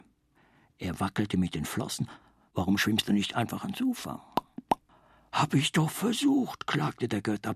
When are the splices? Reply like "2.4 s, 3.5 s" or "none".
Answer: none